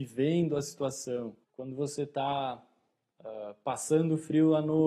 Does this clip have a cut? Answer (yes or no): yes